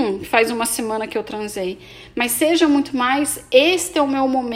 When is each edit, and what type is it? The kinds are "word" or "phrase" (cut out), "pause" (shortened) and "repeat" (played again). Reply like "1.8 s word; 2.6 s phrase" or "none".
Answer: none